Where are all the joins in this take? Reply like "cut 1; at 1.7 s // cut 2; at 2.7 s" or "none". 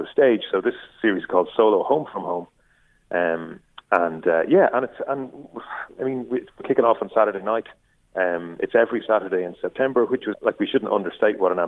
cut 1; at 10.3 s